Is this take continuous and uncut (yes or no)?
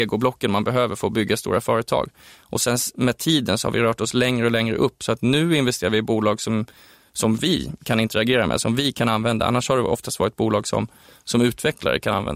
yes